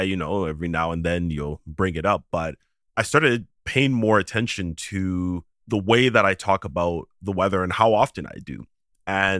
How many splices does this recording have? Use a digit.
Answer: 0